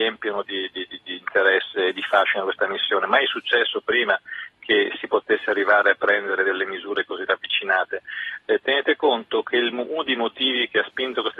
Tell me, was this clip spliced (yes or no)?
no